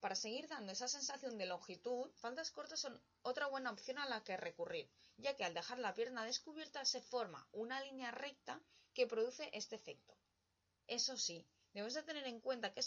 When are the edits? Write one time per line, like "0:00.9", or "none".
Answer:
0:02.2